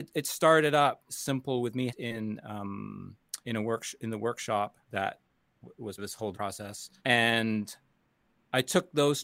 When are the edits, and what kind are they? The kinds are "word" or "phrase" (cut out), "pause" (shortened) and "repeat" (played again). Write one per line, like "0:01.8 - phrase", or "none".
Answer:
0:01.1 - word
0:01.9 - phrase
0:03.4 - pause
0:04.8 - pause
0:06.0 - word
0:06.3 - word
0:07.0 - pause